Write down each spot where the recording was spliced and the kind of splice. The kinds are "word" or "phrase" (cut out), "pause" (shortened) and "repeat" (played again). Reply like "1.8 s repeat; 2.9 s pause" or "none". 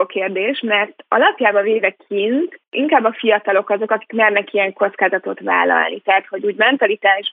none